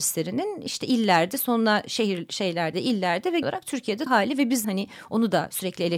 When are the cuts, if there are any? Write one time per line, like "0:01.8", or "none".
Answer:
0:02.7
0:03.4
0:04.1
0:04.6